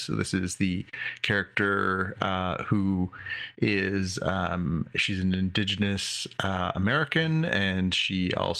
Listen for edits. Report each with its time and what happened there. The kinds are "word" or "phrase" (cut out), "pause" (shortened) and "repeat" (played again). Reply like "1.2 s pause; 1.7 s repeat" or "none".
none